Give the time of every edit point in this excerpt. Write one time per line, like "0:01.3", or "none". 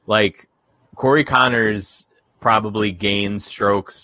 none